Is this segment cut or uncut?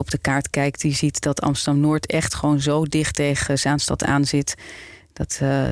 uncut